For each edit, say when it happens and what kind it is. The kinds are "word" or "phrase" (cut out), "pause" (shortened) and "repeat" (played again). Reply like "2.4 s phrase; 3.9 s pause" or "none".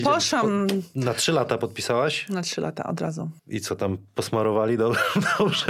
3.4 s pause